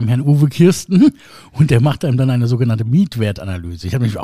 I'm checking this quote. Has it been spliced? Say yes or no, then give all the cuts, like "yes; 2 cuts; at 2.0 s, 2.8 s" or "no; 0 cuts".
no; 0 cuts